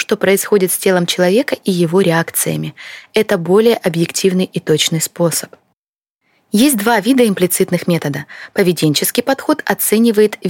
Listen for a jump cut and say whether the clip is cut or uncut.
uncut